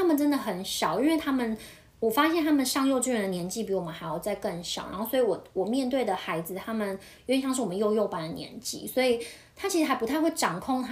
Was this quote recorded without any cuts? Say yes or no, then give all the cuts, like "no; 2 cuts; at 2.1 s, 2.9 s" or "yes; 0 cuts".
yes; 0 cuts